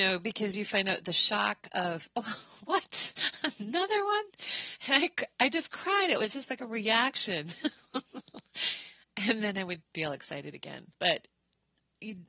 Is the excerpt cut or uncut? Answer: cut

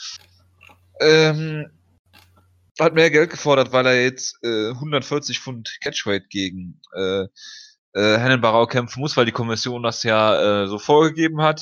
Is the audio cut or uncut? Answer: uncut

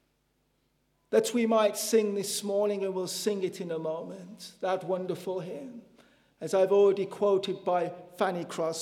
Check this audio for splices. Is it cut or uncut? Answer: uncut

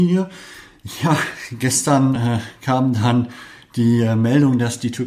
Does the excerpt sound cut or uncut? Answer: uncut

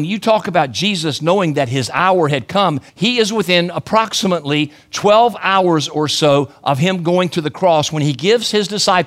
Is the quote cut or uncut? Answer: cut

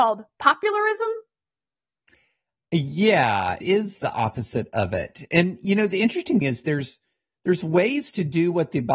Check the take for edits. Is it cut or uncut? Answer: cut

